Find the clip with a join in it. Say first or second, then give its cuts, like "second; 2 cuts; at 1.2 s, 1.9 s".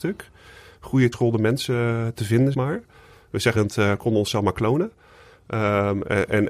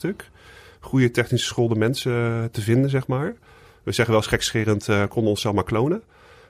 first; 3 cuts; at 1.1 s, 2.5 s, 3.6 s